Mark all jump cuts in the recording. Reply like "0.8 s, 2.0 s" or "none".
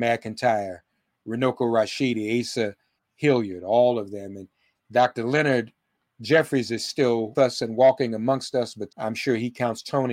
1.2 s, 7.3 s, 8.9 s